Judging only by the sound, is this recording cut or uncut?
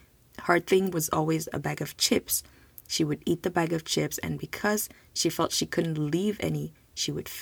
uncut